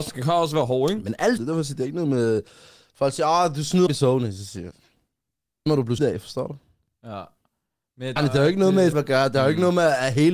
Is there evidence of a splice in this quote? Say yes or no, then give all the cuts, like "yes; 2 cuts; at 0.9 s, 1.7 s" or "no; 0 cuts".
yes; 6 cuts; at 1.4 s, 3.9 s, 5.7 s, 6.0 s, 8.2 s, 8.9 s